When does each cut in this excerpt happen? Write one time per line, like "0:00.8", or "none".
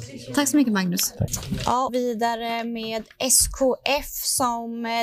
0:01.9